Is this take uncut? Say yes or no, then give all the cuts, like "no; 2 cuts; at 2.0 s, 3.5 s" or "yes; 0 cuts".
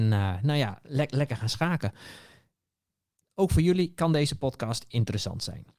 yes; 0 cuts